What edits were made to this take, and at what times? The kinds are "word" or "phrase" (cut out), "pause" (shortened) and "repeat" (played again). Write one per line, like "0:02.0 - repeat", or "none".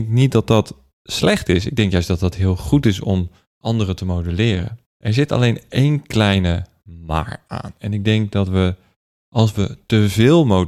0:04.9 - pause